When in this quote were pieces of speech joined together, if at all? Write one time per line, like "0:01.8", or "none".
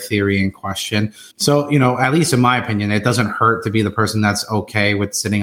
0:01.3

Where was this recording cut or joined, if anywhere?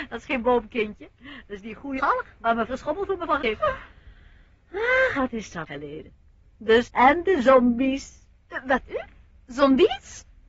0:02.0
0:02.7
0:03.4
0:05.1
0:05.7
0:06.8
0:08.9

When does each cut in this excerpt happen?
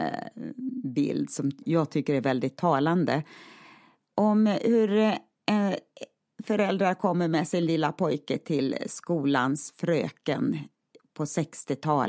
none

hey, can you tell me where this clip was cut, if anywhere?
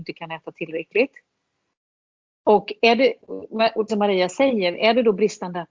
0:03.9

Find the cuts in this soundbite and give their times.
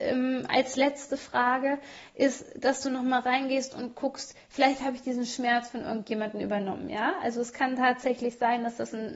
none

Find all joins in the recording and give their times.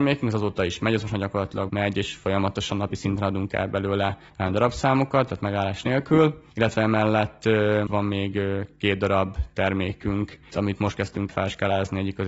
0:01.7
0:04.3
0:06.5
0:07.9
0:10.5
0:11.3

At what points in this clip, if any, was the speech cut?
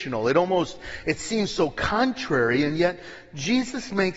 none

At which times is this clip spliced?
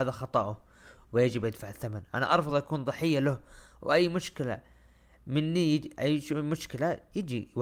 none

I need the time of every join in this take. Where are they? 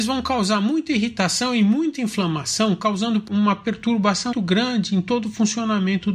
0:04.3

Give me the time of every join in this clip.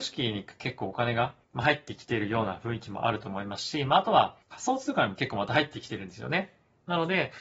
0:01.4
0:04.4

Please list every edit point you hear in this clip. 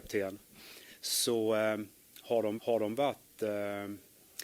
0:02.6

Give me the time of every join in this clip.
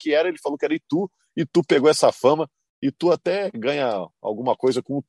none

